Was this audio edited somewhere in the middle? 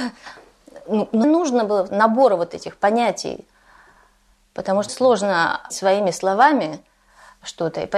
yes; 4 cuts; at 1.2 s, 1.9 s, 4.9 s, 5.7 s

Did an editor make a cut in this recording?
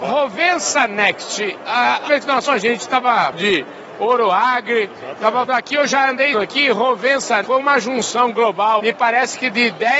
yes; 7 cuts; at 2.1 s, 2.5 s, 3.3 s, 5.5 s, 6.3 s, 7.4 s, 8.8 s

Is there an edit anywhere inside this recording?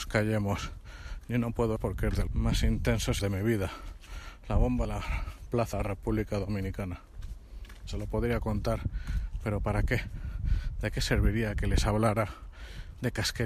yes; 5 cuts; at 1.8 s, 2.3 s, 3.2 s, 4.8 s, 5.7 s

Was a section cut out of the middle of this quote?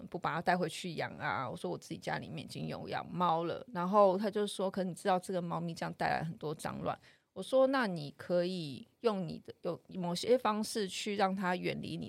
no; 0 cuts

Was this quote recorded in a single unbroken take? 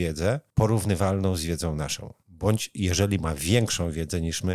no; 1 cut; at 2.2 s

